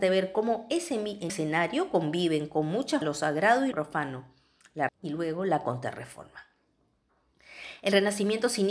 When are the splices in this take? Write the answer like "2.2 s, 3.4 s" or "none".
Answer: 1.3 s, 3.0 s, 3.7 s, 4.9 s